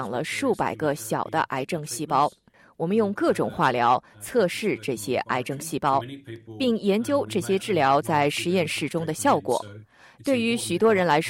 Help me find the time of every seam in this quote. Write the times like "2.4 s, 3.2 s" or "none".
none